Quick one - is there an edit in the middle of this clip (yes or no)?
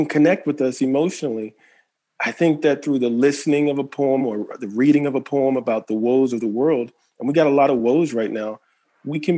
no